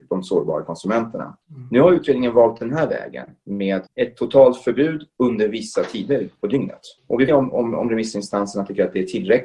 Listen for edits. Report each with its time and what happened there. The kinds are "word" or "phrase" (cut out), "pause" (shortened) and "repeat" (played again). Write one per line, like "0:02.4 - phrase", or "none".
0:01.4 - pause
0:03.9 - pause
0:07.0 - pause
0:07.3 - phrase